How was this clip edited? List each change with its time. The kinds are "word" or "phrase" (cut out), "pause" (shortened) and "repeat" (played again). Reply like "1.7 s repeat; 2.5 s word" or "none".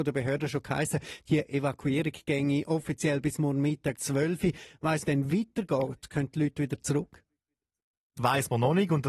3.9 s word; 5.0 s phrase; 8.2 s phrase